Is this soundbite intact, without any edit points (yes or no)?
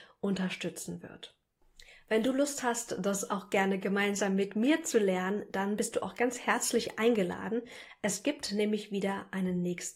yes